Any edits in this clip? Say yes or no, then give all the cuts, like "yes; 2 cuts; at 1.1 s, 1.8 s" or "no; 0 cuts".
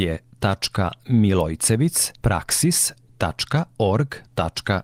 yes; 1 cut; at 2.2 s